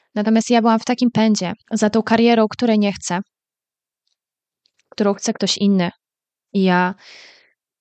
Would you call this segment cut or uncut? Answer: cut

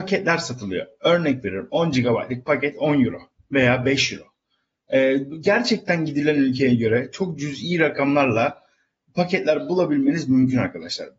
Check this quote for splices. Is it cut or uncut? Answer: uncut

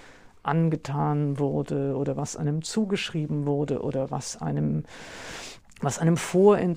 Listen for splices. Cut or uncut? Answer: uncut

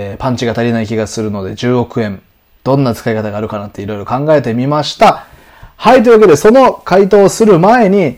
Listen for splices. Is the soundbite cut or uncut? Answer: uncut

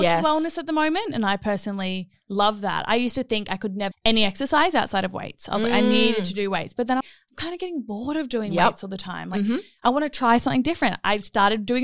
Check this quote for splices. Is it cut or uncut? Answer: cut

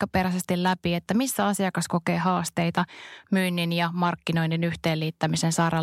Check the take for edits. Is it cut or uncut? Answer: uncut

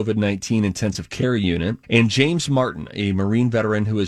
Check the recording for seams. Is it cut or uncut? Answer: cut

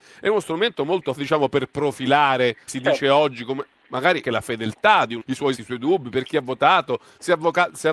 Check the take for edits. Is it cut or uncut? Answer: cut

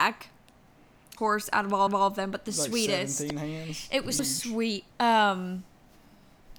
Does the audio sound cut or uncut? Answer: cut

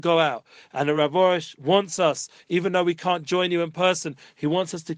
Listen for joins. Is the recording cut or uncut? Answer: uncut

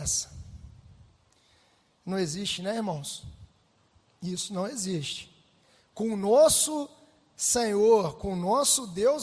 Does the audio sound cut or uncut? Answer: uncut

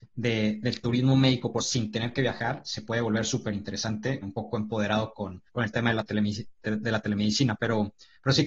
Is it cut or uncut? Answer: cut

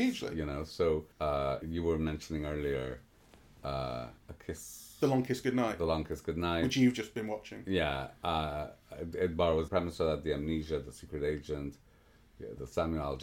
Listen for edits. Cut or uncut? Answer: cut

